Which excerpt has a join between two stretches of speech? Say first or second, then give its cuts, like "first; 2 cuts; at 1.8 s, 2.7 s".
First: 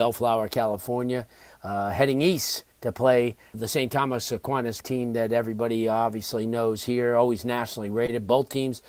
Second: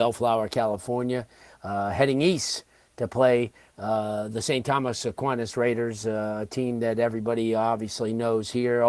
first; 3 cuts; at 2.7 s, 3.5 s, 4.8 s